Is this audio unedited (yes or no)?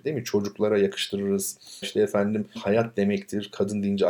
no